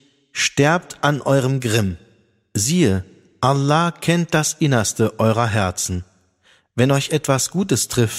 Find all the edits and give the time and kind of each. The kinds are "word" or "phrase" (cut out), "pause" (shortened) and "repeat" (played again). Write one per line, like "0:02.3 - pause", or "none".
none